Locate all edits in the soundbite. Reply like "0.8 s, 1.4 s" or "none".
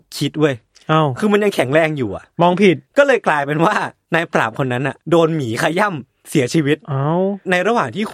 2.9 s, 5.0 s